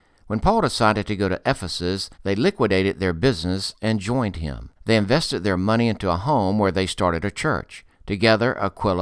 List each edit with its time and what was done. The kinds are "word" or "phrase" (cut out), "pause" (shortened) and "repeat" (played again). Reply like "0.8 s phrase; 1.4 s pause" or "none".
2.1 s pause; 4.8 s pause; 7.9 s pause